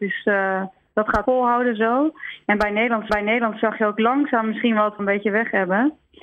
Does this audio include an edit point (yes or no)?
yes